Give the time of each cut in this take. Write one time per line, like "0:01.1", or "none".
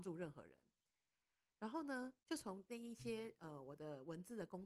0:02.2